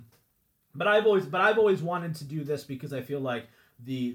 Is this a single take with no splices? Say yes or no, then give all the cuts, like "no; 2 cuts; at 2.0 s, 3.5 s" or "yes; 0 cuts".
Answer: yes; 0 cuts